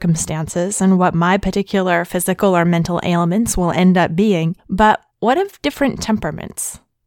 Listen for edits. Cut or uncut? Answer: cut